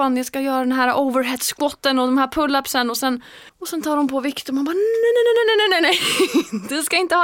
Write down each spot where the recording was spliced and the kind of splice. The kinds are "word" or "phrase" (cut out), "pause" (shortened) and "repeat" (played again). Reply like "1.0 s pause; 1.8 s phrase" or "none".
3.5 s pause